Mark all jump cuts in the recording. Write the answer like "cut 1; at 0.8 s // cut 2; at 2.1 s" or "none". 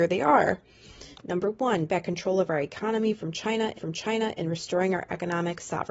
cut 1; at 1.1 s // cut 2; at 1.9 s // cut 3; at 3.7 s